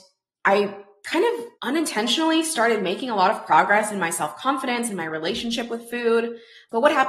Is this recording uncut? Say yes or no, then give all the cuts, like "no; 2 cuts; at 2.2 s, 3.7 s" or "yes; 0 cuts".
no; 1 cut; at 1.5 s